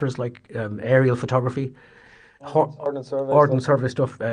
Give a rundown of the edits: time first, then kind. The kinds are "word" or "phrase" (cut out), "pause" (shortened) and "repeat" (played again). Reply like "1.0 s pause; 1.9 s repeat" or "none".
none